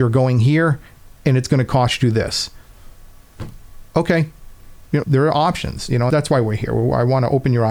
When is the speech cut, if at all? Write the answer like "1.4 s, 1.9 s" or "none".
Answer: 5.0 s, 6.1 s